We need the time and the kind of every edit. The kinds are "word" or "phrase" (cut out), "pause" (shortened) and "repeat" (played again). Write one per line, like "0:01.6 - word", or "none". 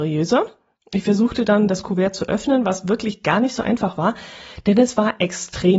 none